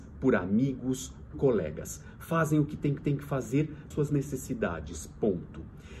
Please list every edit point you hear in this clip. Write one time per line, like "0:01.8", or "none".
0:01.3
0:03.0
0:03.9